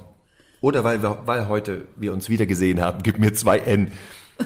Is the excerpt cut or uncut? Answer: uncut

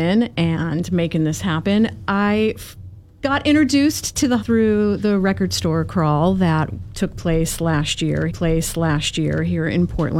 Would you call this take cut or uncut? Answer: cut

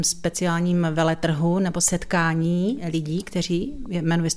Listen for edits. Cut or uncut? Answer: uncut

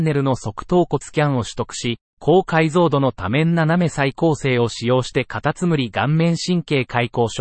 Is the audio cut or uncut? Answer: cut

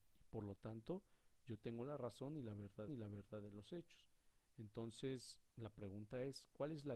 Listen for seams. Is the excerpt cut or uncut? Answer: cut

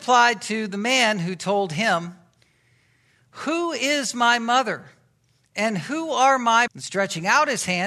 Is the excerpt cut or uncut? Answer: cut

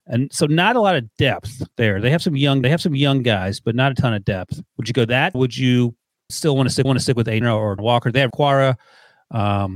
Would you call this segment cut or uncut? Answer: cut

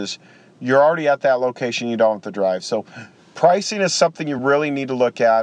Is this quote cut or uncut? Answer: uncut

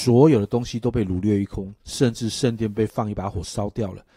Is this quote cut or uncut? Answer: cut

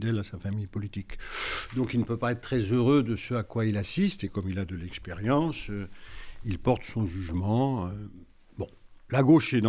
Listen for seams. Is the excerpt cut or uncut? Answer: uncut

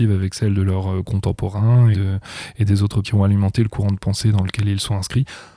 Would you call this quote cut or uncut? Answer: cut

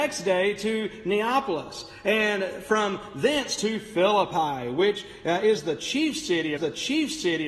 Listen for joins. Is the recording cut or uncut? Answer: cut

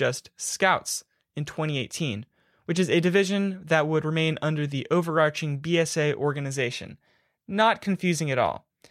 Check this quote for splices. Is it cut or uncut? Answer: uncut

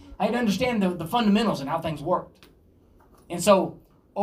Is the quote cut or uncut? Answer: uncut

